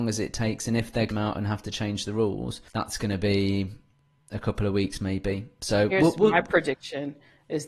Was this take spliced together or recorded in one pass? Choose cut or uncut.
cut